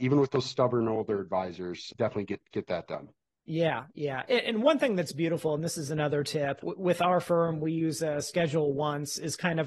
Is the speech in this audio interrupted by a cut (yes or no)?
no